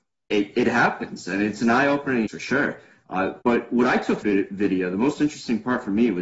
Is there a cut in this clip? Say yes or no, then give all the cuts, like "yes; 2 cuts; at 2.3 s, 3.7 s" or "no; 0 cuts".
yes; 3 cuts; at 2.3 s, 3.4 s, 4.2 s